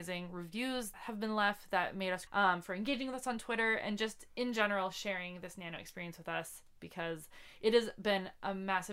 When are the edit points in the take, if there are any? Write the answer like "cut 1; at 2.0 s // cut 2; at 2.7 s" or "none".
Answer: cut 1; at 0.9 s // cut 2; at 2.3 s